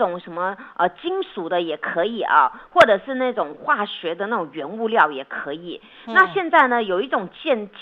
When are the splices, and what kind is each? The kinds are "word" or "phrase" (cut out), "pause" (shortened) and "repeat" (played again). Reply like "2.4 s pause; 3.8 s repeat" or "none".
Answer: none